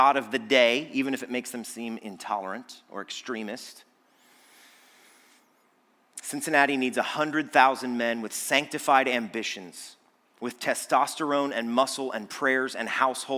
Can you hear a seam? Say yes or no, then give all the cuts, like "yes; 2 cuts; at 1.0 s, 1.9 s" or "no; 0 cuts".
no; 0 cuts